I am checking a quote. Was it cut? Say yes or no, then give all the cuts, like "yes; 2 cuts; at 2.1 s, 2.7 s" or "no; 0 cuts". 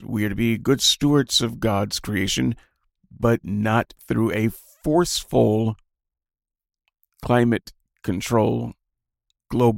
no; 0 cuts